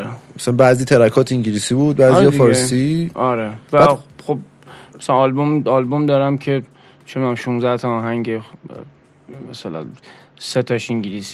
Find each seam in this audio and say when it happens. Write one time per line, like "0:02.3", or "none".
0:03.6